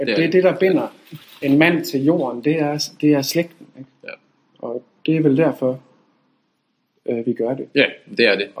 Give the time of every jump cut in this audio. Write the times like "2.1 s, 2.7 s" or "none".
none

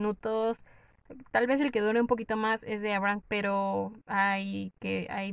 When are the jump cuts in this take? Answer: 3.2 s

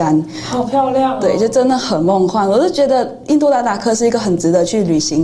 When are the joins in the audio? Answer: none

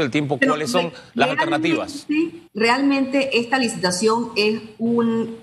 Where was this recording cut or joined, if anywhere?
2.5 s

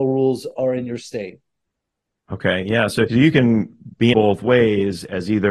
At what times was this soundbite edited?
3.1 s, 4.1 s

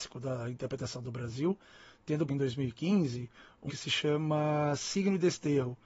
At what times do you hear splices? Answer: 2.3 s, 3.7 s

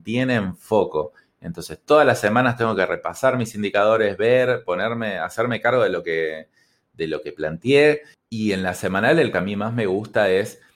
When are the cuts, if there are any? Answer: 9.3 s

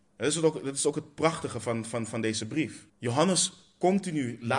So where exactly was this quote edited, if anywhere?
2.9 s

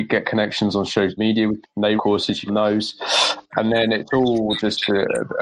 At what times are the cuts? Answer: 1.2 s, 1.6 s, 2.0 s, 2.5 s, 3.5 s

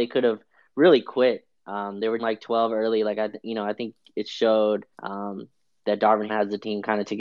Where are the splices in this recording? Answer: 2.2 s, 4.9 s, 6.3 s

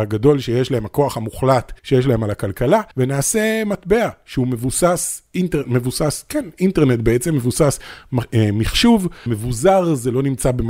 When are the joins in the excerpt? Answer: 1.8 s, 2.9 s, 9.3 s

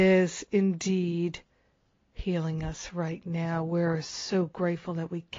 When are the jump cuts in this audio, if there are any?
none

